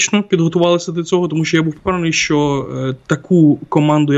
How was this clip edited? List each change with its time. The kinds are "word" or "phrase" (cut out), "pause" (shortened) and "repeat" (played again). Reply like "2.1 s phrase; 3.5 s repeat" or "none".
none